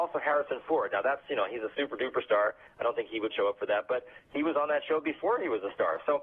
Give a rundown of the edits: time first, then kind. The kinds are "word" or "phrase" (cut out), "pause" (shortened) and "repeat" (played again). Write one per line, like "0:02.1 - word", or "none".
0:03.3 - word